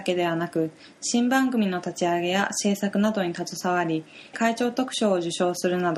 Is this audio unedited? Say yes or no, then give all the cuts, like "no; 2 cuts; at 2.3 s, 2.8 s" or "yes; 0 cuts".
no; 1 cut; at 4.3 s